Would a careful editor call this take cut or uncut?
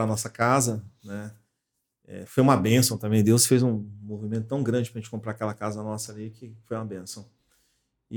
uncut